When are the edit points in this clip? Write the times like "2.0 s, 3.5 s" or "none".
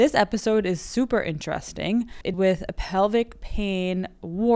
2.3 s